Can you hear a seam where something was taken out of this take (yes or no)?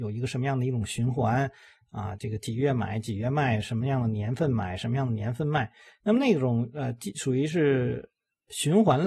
no